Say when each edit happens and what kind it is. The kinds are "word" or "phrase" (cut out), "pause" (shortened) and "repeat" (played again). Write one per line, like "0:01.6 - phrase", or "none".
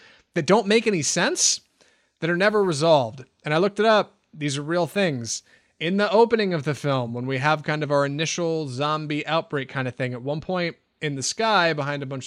none